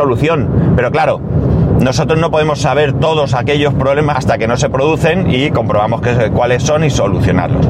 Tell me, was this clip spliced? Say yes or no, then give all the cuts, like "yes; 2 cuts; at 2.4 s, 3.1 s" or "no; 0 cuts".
yes; 1 cut; at 4.1 s